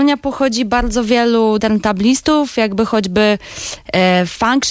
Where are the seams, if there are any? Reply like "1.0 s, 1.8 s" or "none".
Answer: 1.6 s